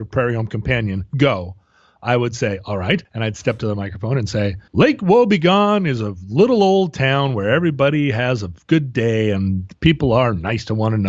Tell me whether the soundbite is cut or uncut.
cut